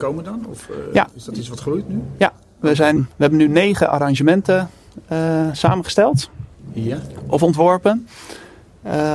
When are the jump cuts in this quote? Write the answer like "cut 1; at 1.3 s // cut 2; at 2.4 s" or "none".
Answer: cut 1; at 3.0 s